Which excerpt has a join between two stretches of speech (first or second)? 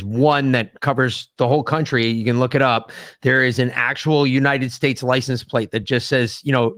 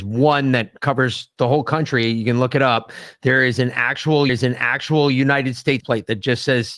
second